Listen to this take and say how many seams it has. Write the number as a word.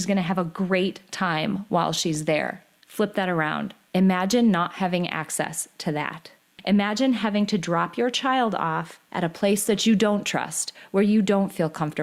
zero